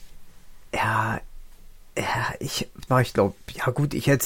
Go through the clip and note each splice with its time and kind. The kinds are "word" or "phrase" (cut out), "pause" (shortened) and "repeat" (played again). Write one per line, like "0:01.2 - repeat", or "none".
0:01.9 - pause
0:02.9 - word